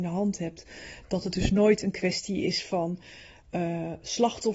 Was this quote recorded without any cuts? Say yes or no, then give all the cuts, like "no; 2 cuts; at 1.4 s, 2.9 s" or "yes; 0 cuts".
yes; 0 cuts